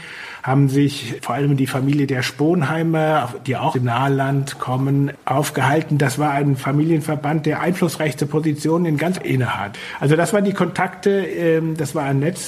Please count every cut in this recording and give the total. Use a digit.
2